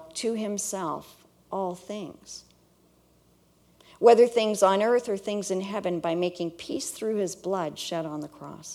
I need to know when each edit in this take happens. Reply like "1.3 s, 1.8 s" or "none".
none